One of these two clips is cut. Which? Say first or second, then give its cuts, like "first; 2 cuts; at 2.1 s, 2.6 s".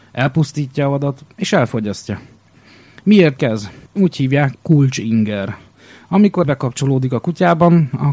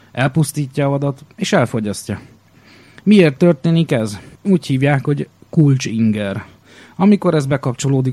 first; 3 cuts; at 3.4 s, 4.5 s, 6.4 s